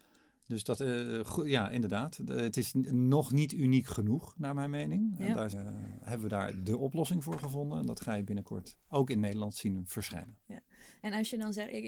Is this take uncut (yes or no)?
no